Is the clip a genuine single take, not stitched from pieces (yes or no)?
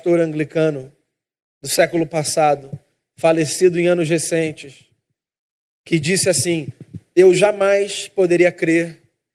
yes